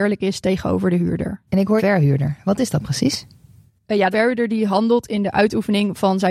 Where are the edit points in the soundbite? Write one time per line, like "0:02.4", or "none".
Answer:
0:01.5
0:01.8
0:04.1